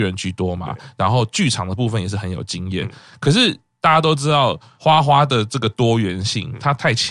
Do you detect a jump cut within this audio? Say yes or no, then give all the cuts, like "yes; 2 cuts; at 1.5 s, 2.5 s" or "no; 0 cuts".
no; 0 cuts